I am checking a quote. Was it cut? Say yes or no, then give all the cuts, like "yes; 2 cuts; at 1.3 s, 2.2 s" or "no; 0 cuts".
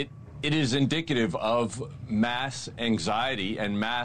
no; 0 cuts